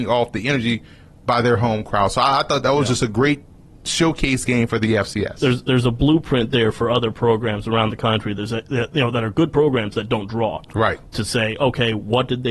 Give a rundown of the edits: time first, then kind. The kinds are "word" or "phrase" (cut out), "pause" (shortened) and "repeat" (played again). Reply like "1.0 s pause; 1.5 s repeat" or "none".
none